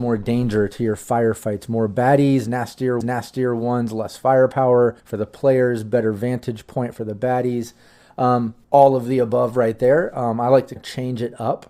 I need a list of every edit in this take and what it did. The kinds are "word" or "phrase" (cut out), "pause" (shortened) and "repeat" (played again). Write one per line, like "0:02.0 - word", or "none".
0:03.0 - repeat
0:05.0 - pause
0:08.6 - pause
0:10.8 - word